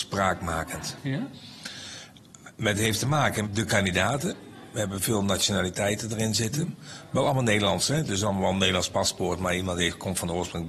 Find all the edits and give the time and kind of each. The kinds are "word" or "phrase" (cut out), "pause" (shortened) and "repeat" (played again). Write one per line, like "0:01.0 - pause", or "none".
0:03.4 - word

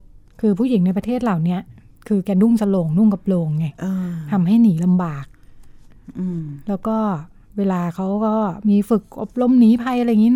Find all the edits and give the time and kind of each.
none

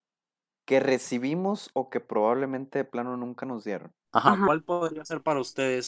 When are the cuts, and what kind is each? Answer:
0:04.0 - pause

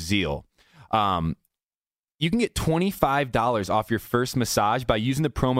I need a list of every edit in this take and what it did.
none

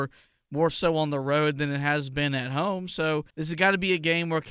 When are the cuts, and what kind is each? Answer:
0:03.3 - pause

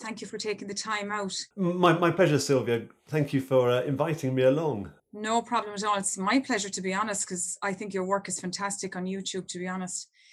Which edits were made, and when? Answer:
0:01.5 - pause
0:05.0 - pause

